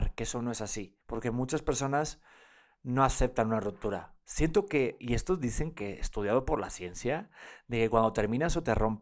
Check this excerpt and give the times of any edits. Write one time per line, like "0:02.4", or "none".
0:01.0